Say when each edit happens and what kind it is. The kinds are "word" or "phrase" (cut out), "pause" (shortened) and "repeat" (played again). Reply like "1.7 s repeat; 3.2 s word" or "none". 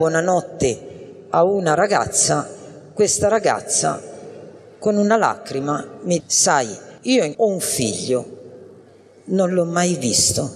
6.2 s word; 7.0 s pause; 7.3 s phrase